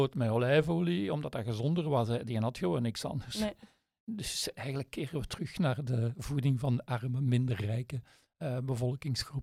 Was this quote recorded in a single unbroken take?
yes; 0 cuts

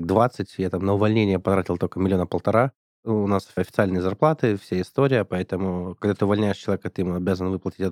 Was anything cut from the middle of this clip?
no; 0 cuts

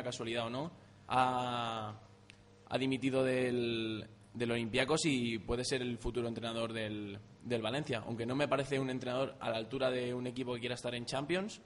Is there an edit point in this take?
no; 0 cuts

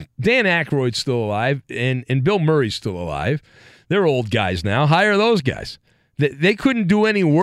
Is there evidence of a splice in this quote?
no; 0 cuts

